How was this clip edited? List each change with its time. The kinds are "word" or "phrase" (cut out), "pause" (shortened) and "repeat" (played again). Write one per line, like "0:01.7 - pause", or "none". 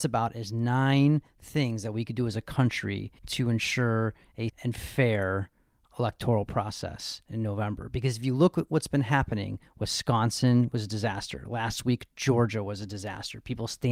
0:03.2 - pause
0:04.5 - word